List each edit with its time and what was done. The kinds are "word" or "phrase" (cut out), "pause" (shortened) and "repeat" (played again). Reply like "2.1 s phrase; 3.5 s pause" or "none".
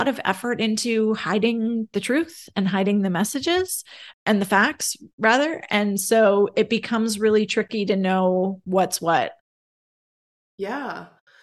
4.1 s word